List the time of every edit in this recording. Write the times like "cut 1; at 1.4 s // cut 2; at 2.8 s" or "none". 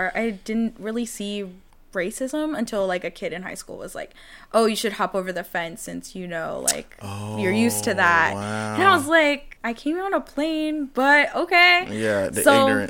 cut 1; at 1.7 s // cut 2; at 9.6 s